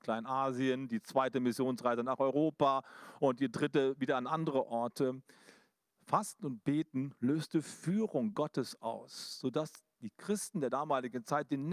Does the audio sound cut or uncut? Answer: uncut